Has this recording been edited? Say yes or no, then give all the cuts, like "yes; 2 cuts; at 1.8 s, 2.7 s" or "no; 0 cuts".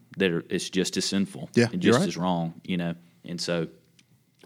no; 0 cuts